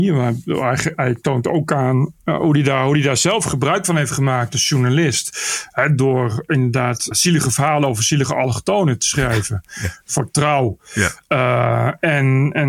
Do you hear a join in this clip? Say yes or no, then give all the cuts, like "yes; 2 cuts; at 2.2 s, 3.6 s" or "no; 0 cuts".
yes; 1 cut; at 7.1 s